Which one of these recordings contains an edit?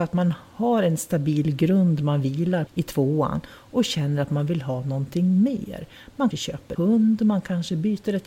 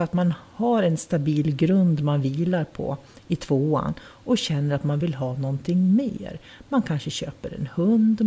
first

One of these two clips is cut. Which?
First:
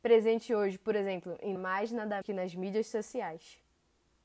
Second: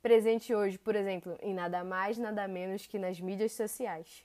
first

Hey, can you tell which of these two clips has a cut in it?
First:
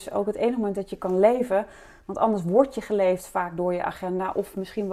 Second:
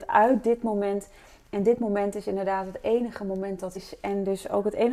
second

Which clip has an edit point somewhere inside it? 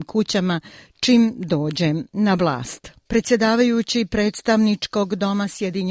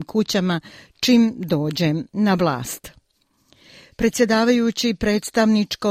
first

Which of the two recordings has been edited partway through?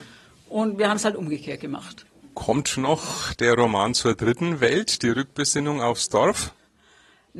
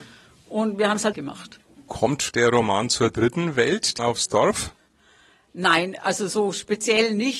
second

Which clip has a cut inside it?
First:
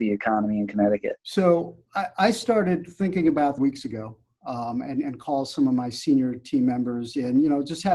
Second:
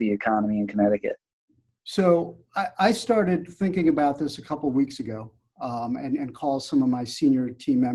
first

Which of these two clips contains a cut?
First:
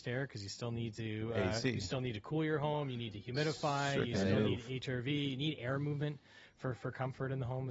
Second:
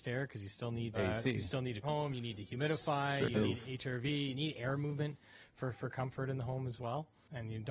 second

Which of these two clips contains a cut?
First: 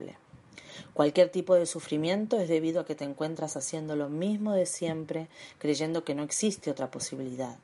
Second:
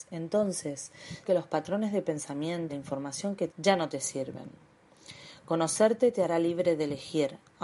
second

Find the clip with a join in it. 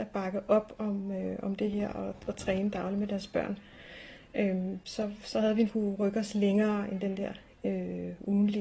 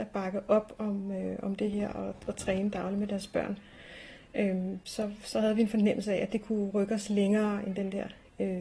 first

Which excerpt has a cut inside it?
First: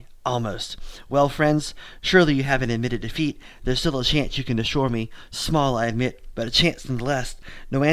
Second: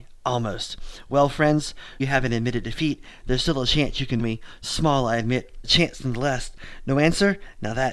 second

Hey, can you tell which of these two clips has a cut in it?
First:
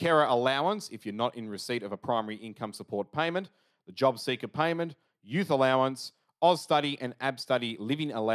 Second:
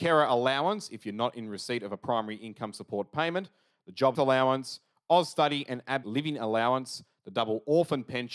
second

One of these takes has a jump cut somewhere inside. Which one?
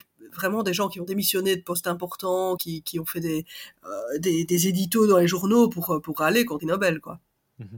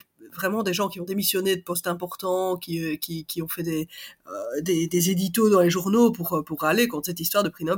first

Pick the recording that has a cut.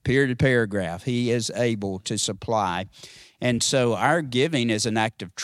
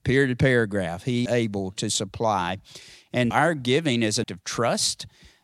second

